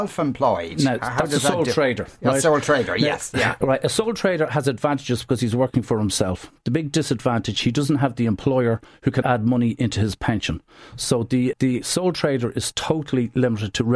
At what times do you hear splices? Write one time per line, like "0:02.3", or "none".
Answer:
0:09.2
0:11.5